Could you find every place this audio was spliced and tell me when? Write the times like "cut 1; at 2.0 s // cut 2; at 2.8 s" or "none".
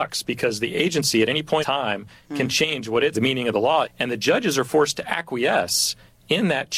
cut 1; at 1.6 s // cut 2; at 3.1 s // cut 3; at 3.8 s